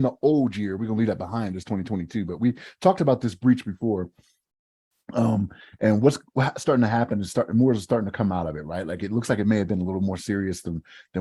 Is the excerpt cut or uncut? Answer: uncut